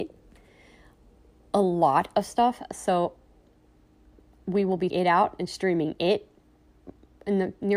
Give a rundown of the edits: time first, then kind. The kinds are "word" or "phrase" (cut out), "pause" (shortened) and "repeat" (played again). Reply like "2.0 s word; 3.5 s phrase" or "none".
4.9 s word